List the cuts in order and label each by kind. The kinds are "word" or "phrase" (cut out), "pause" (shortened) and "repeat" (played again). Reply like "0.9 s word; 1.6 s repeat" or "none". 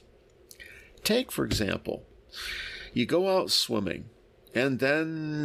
none